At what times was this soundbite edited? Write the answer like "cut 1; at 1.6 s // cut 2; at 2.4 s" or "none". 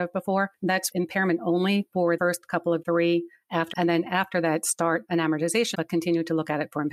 cut 1; at 0.9 s // cut 2; at 2.2 s // cut 3; at 2.8 s // cut 4; at 3.7 s // cut 5; at 5.7 s